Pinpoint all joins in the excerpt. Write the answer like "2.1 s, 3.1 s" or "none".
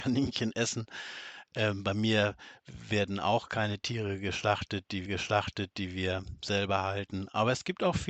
5.1 s